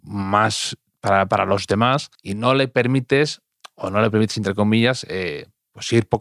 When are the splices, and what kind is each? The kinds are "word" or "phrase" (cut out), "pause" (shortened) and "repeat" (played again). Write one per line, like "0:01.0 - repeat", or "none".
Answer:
0:02.1 - pause